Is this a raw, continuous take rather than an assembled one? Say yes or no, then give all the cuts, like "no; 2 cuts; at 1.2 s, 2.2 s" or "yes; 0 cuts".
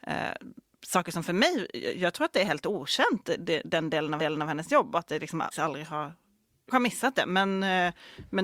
no; 3 cuts; at 4.2 s, 5.5 s, 6.7 s